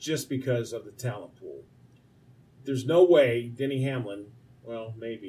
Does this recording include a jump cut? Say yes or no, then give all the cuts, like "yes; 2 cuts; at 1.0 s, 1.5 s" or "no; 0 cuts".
no; 0 cuts